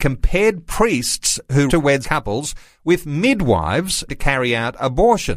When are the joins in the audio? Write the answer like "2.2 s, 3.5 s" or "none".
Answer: 1.7 s, 2.0 s, 4.1 s